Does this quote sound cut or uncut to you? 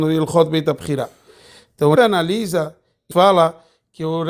cut